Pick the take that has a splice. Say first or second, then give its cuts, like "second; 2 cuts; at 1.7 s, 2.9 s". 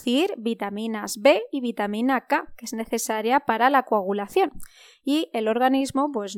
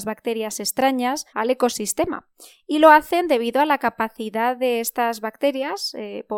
second; 1 cut; at 1.3 s